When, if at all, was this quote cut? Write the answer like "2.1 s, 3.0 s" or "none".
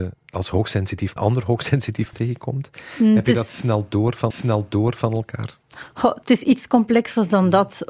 1.2 s, 2.1 s, 4.3 s, 6.2 s